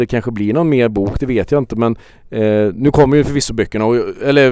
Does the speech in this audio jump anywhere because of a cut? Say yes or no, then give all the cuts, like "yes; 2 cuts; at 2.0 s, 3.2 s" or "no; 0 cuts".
no; 0 cuts